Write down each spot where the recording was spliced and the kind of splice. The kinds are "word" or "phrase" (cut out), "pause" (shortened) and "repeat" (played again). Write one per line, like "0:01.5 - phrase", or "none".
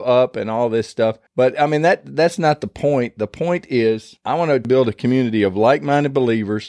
0:01.3 - pause